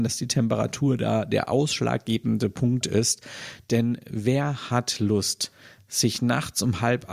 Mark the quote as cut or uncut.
uncut